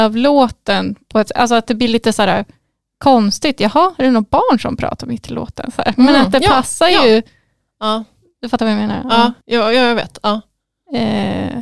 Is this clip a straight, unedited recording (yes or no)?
no